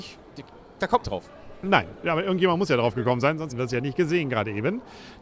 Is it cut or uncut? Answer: cut